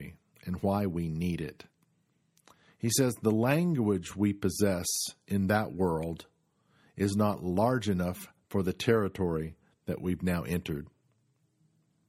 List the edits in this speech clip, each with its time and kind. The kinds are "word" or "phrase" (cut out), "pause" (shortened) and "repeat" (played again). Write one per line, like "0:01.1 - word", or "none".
none